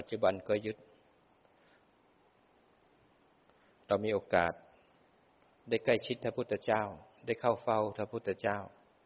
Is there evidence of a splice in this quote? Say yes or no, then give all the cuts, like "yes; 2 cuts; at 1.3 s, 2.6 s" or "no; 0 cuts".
no; 0 cuts